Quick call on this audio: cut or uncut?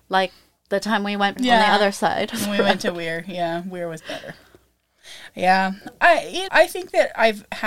cut